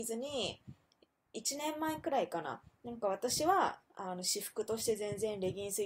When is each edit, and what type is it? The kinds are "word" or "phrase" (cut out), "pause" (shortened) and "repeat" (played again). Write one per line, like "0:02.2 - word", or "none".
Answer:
0:03.8 - pause